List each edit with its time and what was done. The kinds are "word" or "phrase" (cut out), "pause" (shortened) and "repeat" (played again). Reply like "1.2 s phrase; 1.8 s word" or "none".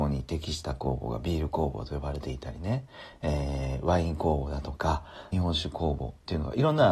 5.3 s phrase